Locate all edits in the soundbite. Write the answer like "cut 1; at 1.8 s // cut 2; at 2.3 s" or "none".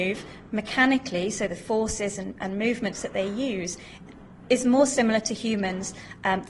none